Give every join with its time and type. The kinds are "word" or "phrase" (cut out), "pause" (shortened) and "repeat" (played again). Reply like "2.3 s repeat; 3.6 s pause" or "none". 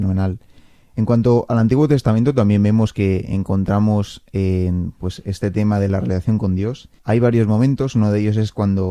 7.0 s pause

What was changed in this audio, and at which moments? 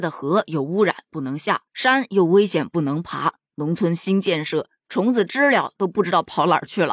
1.7 s pause

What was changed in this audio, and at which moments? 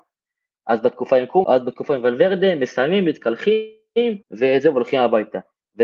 1.4 s word; 4.2 s pause

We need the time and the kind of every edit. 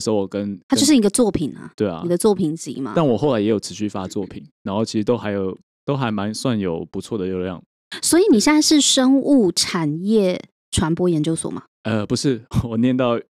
none

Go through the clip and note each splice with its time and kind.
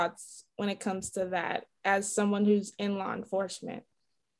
none

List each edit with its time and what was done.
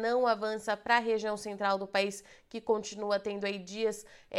none

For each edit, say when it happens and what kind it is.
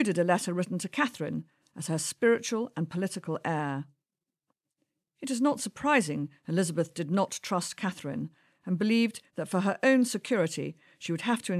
none

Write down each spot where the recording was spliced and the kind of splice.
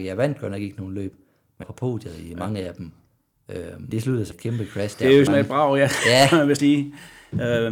1.6 s word; 3.9 s word; 4.3 s word; 5.3 s word; 6.6 s word

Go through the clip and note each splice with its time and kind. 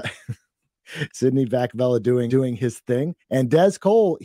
2.3 s word; 3.2 s pause

